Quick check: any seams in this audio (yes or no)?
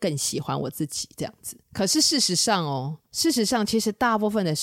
yes